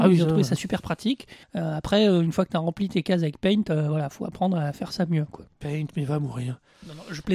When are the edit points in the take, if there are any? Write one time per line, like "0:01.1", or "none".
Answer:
0:01.4